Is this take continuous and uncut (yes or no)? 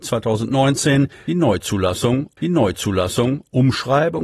no